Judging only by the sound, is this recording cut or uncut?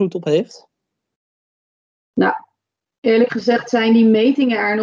uncut